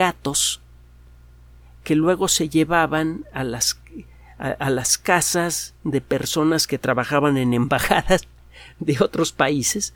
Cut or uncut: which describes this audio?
uncut